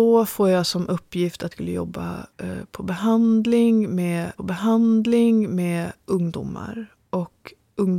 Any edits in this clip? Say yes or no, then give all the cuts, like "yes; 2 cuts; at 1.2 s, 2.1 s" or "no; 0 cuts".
yes; 3 cuts; at 1.5 s, 2.3 s, 4.4 s